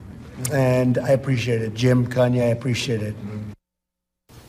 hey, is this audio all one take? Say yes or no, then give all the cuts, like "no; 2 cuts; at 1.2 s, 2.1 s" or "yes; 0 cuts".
yes; 0 cuts